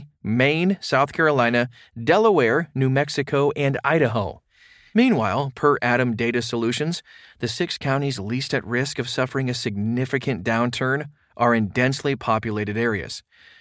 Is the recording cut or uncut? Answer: uncut